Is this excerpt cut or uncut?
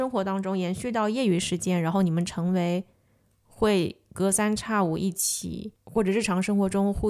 uncut